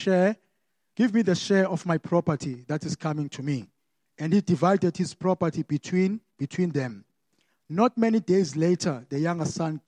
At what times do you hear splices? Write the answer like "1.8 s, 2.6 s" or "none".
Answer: none